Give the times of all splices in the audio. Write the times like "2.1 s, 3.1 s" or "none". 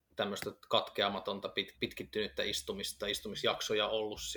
1.7 s